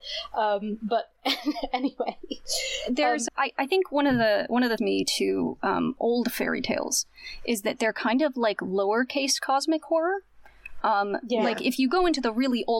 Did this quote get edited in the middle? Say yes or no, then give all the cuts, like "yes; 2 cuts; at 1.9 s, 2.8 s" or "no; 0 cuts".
yes; 2 cuts; at 3.3 s, 4.8 s